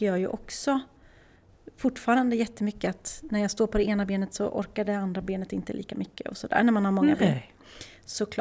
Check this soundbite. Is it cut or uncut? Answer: uncut